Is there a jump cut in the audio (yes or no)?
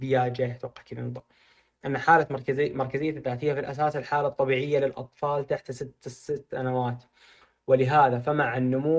no